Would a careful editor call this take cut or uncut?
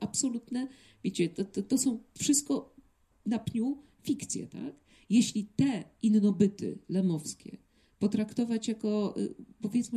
uncut